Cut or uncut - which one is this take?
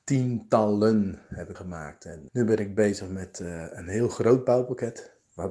cut